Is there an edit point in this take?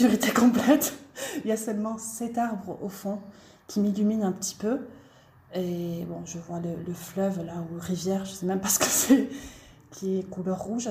no; 0 cuts

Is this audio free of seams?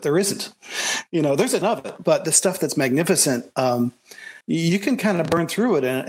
no; 3 cuts; at 1.6 s, 2.0 s, 4.4 s

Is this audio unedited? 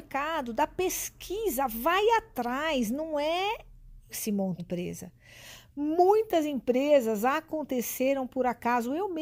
no; 2 cuts; at 4.1 s, 4.6 s

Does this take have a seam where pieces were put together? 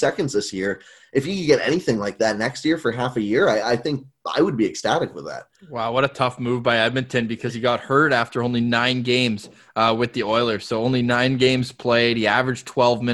no; 0 cuts

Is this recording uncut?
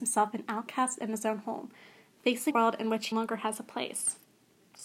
no; 2 cuts; at 2.5 s, 3.1 s

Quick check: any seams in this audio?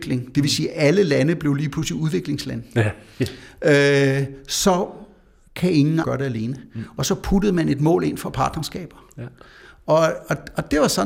yes; 1 cut; at 6.0 s

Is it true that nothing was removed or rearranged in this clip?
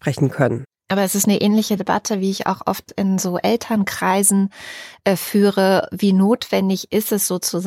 yes; 0 cuts

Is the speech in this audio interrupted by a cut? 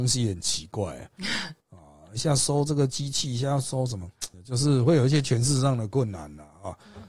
yes; 2 cuts; at 1.6 s, 4.3 s

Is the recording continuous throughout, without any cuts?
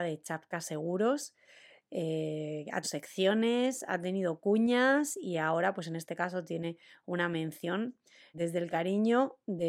no; 2 cuts; at 2.8 s, 8.3 s

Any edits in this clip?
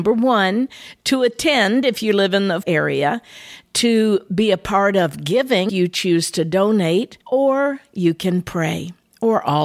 yes; 3 cuts; at 2.6 s, 5.7 s, 7.2 s

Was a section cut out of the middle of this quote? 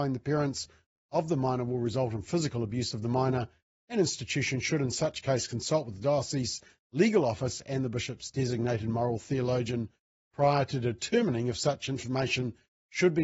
no; 0 cuts

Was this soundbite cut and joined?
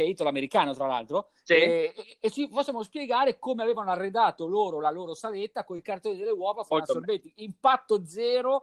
no; 0 cuts

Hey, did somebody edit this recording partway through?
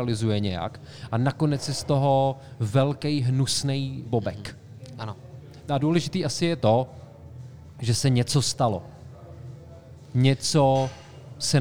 yes; 2 cuts; at 4.1 s, 5.8 s

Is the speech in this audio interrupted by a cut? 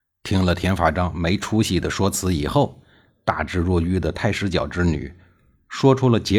no; 0 cuts

